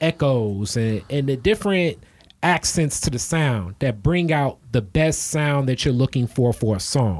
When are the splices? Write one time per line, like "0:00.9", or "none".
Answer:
none